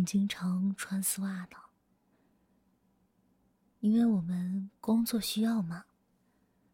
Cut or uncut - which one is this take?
uncut